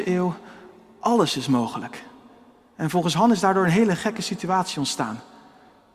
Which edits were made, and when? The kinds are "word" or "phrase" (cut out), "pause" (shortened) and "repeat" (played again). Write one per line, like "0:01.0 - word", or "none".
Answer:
none